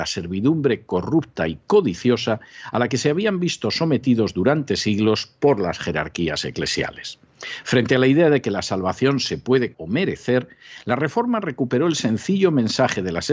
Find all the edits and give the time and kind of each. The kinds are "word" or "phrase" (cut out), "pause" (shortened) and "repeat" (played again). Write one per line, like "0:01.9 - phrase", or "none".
0:09.7 - word